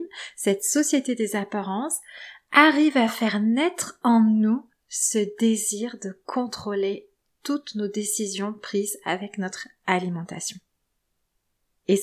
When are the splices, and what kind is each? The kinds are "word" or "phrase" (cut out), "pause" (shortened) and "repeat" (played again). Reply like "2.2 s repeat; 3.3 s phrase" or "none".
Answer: none